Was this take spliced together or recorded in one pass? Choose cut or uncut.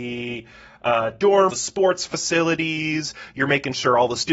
cut